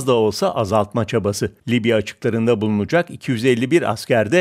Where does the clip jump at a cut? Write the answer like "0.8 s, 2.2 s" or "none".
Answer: 1.6 s

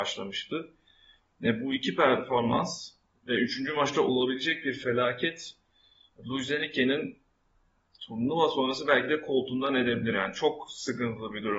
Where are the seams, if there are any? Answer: none

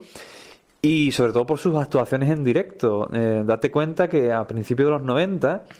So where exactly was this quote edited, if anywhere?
none

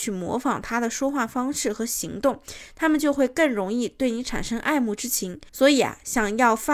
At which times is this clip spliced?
5.5 s

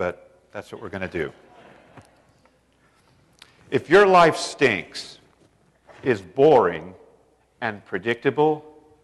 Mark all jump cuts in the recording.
none

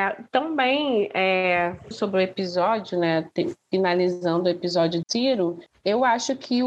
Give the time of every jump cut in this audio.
1.9 s, 5.0 s

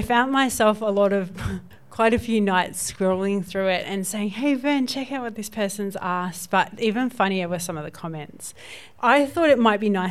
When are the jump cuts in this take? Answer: none

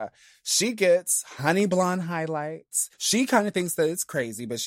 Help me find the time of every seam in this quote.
2.9 s

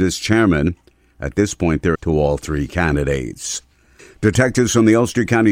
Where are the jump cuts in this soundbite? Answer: 1.9 s

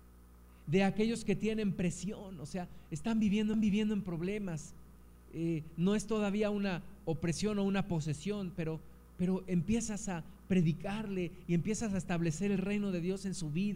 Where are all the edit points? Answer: 3.5 s

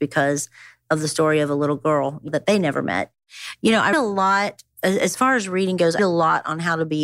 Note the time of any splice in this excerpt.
2.3 s, 3.9 s, 6.0 s

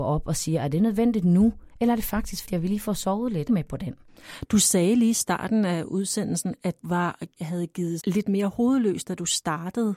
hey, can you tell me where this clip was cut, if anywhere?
1.7 s, 2.4 s, 3.5 s, 6.8 s, 7.4 s, 8.0 s

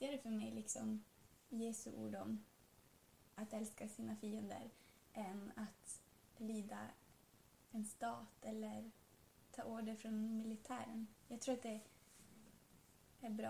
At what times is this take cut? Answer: none

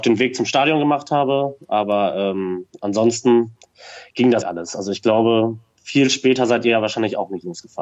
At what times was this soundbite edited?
4.4 s

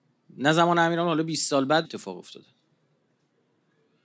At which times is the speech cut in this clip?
1.8 s

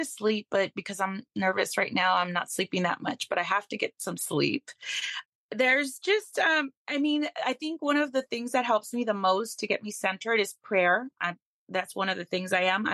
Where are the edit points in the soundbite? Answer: 11.1 s

